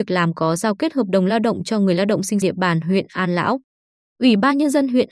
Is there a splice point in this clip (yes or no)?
yes